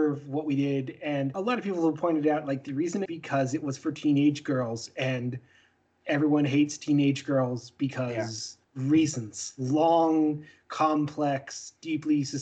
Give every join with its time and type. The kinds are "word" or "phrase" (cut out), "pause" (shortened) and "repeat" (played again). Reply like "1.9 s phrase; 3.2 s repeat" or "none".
3.1 s phrase; 8.6 s pause